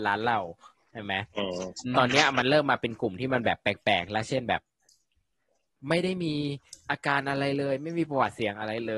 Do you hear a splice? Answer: no; 0 cuts

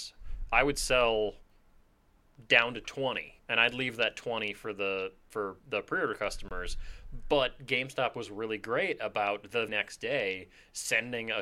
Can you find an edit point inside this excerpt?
yes; 3 cuts; at 3.4 s, 5.6 s, 9.7 s

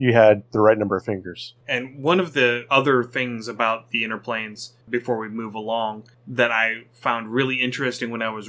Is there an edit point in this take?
yes; 1 cut; at 1.6 s

